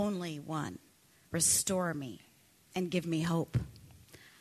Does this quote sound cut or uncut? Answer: cut